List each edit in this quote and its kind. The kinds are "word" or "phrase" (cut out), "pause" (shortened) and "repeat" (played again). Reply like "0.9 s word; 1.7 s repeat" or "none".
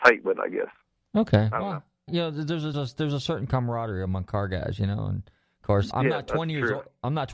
2.1 s word; 2.7 s word; 5.9 s word